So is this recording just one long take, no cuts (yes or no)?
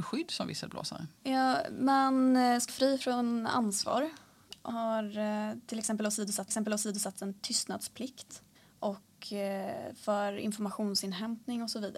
no